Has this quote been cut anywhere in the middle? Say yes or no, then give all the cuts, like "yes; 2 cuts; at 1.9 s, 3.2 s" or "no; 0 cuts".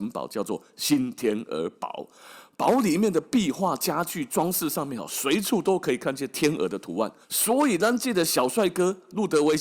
yes; 1 cut; at 7.2 s